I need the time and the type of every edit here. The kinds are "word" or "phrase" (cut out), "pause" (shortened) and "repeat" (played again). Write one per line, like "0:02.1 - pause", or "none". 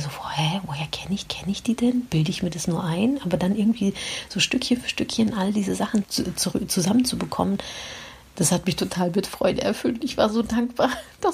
0:01.2 - repeat
0:06.0 - word

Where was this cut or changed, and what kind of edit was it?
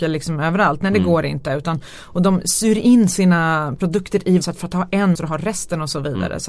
0:04.4 - word
0:05.2 - word

